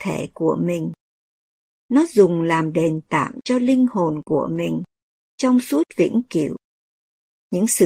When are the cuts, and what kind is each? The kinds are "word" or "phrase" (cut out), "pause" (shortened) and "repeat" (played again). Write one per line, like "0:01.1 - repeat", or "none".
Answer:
none